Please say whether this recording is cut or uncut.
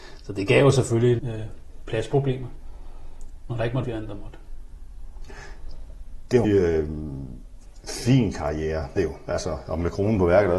cut